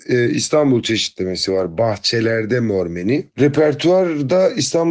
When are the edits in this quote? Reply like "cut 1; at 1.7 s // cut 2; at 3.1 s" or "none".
cut 1; at 3.3 s